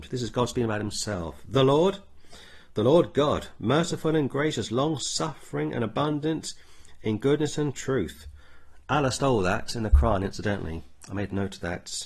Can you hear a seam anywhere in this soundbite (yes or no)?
no